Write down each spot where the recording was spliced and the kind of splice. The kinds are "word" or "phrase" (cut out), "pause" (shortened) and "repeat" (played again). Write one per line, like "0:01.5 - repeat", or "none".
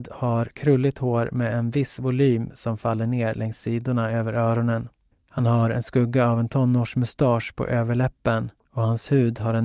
none